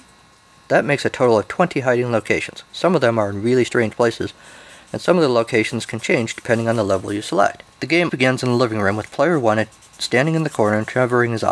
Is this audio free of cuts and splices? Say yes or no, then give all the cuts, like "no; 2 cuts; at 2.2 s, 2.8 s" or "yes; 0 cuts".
no; 2 cuts; at 7.7 s, 8.1 s